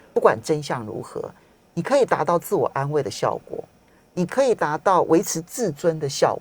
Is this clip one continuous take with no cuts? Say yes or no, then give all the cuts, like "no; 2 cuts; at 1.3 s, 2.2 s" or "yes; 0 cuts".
yes; 0 cuts